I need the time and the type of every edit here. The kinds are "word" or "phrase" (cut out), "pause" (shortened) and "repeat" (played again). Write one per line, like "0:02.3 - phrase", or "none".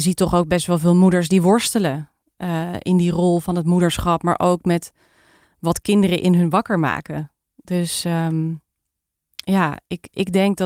none